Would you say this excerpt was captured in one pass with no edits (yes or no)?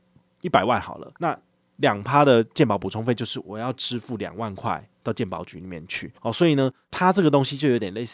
no